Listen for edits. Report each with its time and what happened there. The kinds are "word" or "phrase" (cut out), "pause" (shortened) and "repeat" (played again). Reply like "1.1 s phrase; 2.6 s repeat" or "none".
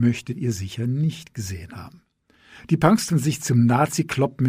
3.1 s word

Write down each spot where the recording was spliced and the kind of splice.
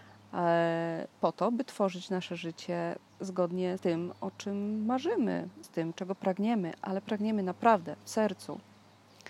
1.1 s pause; 3.8 s word; 5.6 s word

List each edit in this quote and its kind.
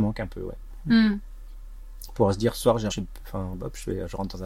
2.9 s word; 3.5 s word

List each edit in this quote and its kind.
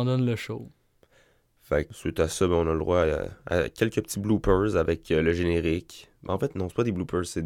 1.9 s word

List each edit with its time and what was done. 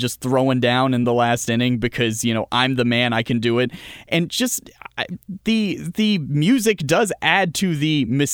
none

